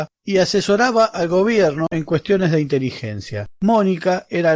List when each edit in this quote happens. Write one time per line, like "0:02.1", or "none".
none